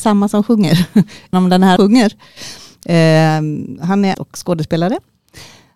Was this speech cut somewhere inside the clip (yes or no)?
yes